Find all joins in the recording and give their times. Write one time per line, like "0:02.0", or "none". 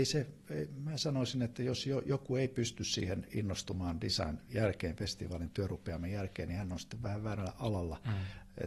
0:04.5